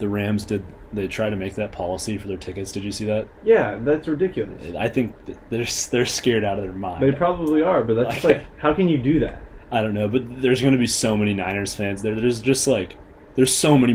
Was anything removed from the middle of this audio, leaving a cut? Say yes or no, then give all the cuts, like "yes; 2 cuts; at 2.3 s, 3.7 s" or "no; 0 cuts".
no; 0 cuts